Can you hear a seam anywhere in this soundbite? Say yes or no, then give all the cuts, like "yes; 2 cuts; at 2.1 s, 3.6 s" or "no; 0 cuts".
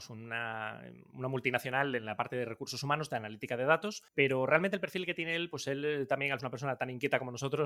yes; 2 cuts; at 4.1 s, 6.4 s